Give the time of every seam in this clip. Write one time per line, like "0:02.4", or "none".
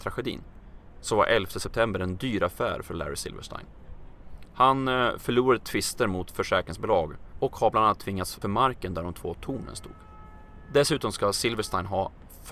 0:08.4